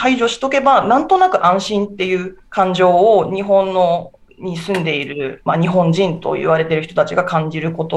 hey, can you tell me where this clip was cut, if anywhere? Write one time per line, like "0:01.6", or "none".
0:02.4